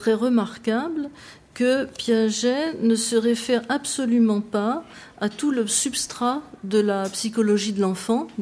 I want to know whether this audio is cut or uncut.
uncut